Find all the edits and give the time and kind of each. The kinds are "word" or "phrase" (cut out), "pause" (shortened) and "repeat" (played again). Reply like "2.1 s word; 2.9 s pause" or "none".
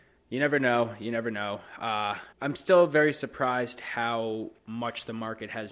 2.3 s pause; 4.6 s pause